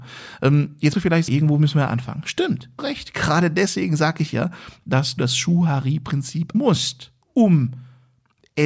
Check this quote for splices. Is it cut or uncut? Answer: cut